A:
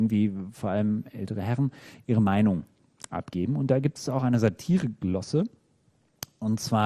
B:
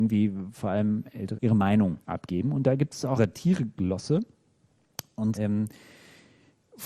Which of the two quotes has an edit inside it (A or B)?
B